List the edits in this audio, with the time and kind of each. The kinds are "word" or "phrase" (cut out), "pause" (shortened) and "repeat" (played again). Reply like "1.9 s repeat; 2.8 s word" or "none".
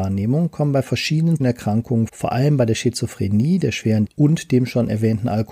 1.4 s word; 2.1 s word; 4.0 s word